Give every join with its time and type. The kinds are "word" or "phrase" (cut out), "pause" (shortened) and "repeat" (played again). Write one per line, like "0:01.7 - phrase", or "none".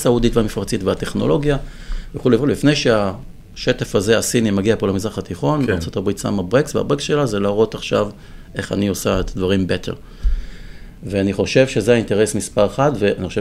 none

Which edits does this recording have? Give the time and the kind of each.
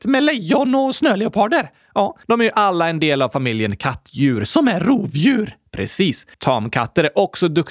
0:02.2 - pause
0:06.3 - pause

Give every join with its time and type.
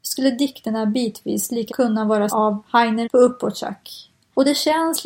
0:01.7 - word
0:02.3 - word
0:03.0 - word

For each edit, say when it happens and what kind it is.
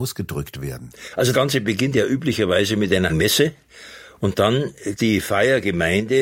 0:01.3 - word
0:03.1 - word
0:05.0 - word

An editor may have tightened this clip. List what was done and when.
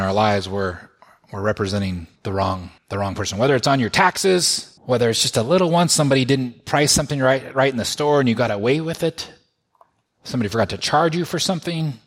0:02.2 - pause
0:02.8 - pause
0:04.8 - pause

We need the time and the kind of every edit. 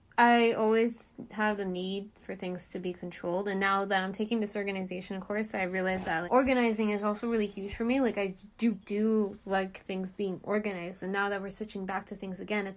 0:06.3 - word
0:08.7 - word

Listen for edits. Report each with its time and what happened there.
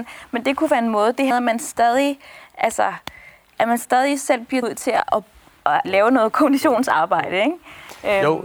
0:01.3 - word
0:04.6 - word
0:05.8 - word

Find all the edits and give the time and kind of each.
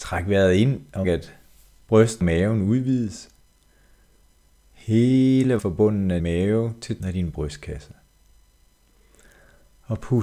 0:01.0 - word
0:02.2 - word
0:05.6 - word
0:06.2 - word
0:07.0 - word

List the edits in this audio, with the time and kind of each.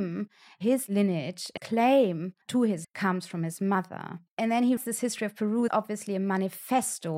0:01.6 - word
0:02.4 - pause
0:02.8 - word
0:04.3 - pause
0:04.8 - word
0:05.7 - word

